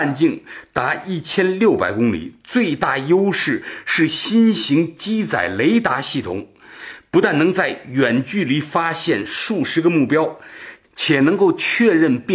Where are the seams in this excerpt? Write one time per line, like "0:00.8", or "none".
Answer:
none

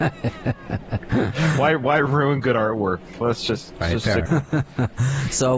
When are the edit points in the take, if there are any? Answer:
0:03.8
0:04.3

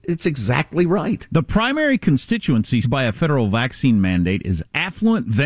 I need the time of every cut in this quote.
0:02.8

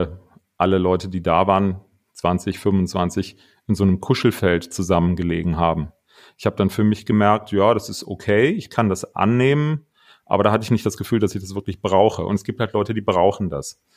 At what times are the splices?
none

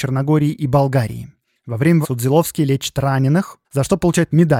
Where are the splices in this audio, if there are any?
0:02.0
0:03.6

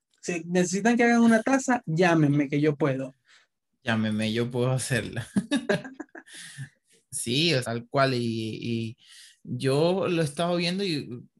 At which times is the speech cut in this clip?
0:07.6

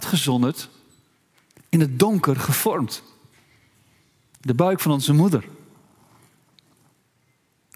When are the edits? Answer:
none

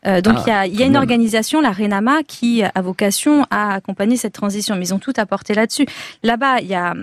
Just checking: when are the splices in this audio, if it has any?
none

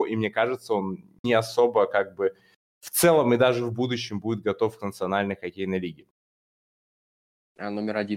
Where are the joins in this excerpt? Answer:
0:01.2

